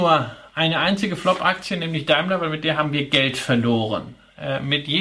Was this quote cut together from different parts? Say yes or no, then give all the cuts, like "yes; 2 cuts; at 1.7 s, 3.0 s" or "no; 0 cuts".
no; 0 cuts